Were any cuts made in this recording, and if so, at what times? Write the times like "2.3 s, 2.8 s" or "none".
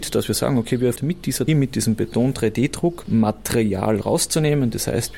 1.0 s, 1.5 s